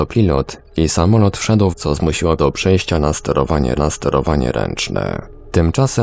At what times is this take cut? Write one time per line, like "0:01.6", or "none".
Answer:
0:01.7
0:02.4
0:03.8